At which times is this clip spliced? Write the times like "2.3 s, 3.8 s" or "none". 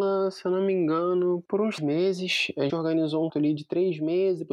1.8 s, 2.7 s, 3.3 s